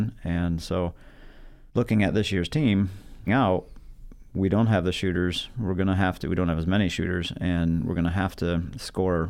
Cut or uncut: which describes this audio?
cut